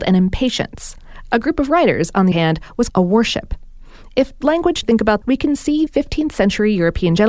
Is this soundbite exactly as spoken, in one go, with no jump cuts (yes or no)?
no